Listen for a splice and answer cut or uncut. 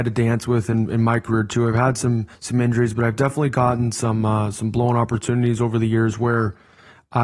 cut